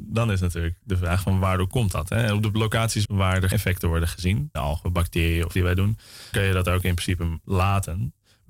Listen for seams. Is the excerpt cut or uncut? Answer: cut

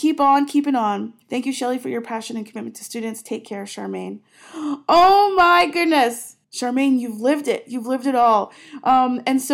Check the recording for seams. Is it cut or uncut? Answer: cut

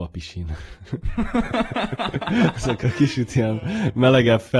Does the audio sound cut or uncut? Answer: uncut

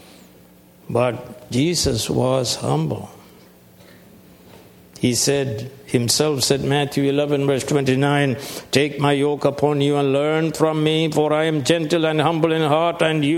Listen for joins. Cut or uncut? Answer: uncut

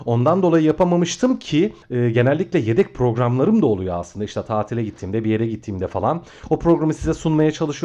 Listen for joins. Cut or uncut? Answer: cut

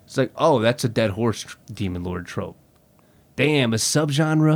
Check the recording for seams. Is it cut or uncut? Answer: cut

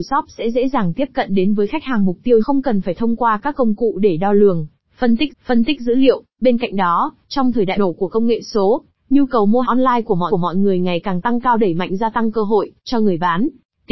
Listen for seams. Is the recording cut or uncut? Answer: cut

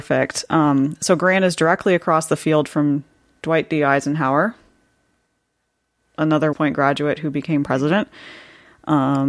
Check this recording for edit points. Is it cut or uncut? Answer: cut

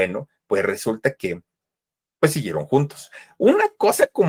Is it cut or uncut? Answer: uncut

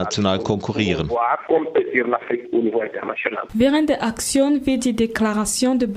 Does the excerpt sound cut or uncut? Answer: uncut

